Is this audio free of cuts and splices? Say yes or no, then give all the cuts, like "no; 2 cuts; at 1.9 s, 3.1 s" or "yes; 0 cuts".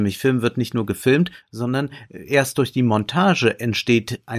yes; 0 cuts